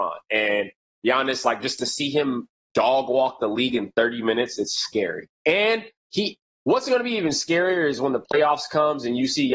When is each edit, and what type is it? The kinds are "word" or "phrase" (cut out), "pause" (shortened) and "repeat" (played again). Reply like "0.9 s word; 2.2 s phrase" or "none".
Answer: 6.0 s pause